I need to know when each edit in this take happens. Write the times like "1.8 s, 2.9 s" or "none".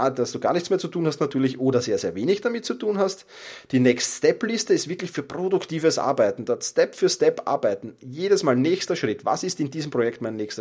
none